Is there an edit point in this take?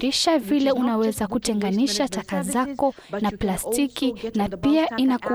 no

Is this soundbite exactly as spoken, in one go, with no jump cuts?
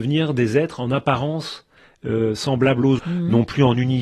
no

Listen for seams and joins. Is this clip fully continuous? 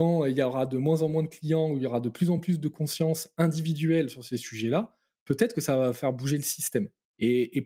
yes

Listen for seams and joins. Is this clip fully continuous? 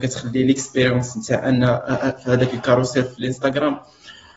yes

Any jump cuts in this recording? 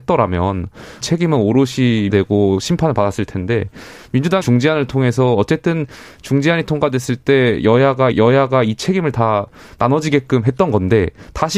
yes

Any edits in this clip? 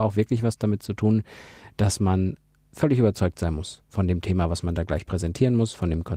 no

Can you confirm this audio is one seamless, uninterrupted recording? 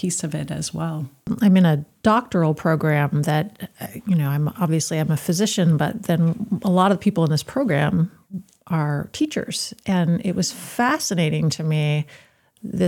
yes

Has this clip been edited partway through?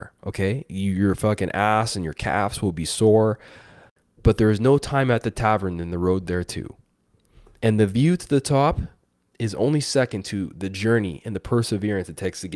no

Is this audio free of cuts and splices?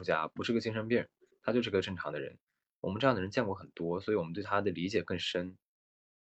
yes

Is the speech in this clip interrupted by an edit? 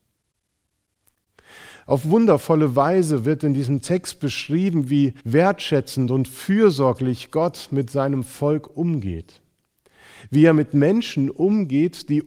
yes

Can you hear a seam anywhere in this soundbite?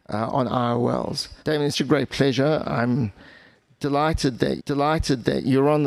yes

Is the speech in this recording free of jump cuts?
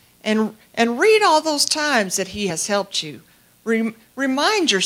yes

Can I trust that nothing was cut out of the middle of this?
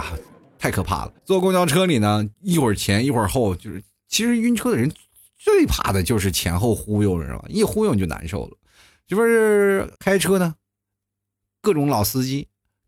no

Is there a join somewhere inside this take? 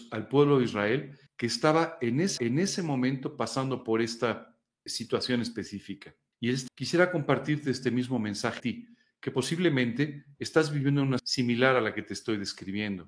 yes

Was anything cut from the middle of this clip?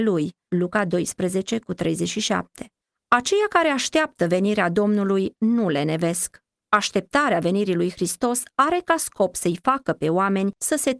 no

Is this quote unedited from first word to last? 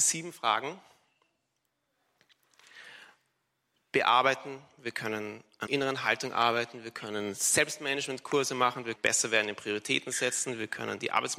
no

